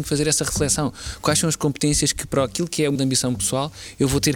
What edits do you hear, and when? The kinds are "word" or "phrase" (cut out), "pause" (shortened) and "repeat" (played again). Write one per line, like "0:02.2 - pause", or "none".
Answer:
0:03.0 - word